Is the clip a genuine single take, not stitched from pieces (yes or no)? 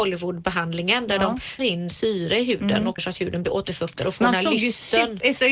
no